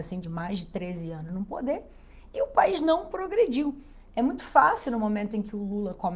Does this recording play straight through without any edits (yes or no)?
yes